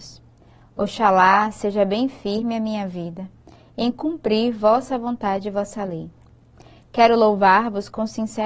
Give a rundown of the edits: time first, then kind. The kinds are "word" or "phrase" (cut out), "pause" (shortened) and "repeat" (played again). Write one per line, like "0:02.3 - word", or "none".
none